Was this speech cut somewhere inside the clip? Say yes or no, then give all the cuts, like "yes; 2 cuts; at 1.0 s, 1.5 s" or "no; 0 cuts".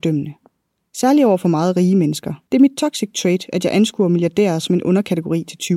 yes; 1 cut; at 2.5 s